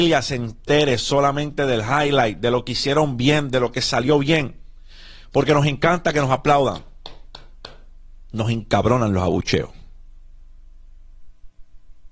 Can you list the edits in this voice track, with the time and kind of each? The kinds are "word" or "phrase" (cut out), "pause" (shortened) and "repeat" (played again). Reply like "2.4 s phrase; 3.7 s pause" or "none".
none